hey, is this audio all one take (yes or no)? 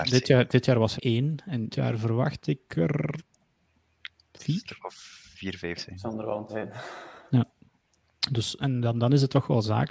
no